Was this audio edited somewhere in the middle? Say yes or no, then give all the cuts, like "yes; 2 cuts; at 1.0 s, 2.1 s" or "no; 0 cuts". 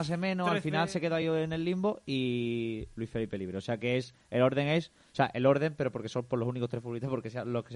no; 0 cuts